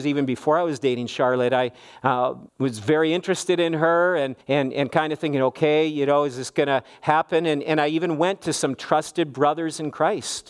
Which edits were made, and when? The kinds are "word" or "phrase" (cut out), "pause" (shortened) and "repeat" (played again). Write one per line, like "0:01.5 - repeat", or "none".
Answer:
0:02.5 - pause
0:04.4 - pause